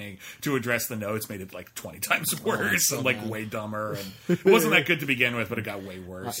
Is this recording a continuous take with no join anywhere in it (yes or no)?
yes